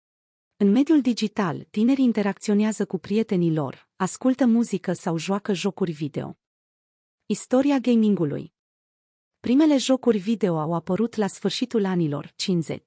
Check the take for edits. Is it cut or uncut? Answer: uncut